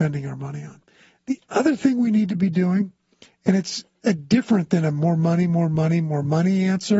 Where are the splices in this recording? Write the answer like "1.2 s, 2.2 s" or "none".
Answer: none